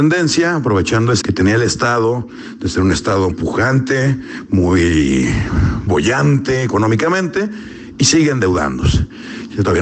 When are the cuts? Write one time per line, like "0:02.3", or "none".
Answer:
0:01.2
0:03.3
0:05.9